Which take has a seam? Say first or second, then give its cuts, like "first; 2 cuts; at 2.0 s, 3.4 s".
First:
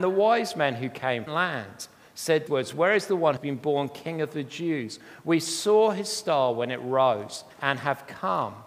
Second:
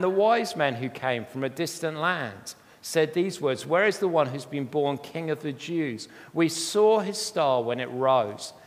first; 4 cuts; at 1.3 s, 2.5 s, 3.4 s, 7.5 s